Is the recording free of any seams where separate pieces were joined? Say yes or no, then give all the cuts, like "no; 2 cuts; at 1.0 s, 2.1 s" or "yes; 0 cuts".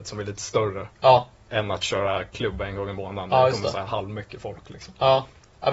no; 1 cut; at 0.9 s